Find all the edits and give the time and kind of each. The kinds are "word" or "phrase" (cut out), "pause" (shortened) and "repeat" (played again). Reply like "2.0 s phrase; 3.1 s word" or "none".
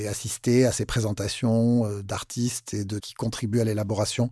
3.0 s word